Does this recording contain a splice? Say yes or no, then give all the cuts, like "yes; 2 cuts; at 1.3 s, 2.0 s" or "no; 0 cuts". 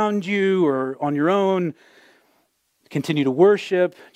no; 0 cuts